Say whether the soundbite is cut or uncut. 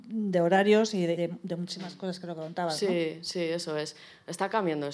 cut